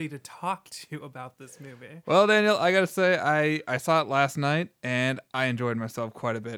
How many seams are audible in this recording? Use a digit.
1